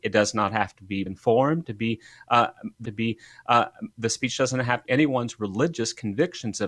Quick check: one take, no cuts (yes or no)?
no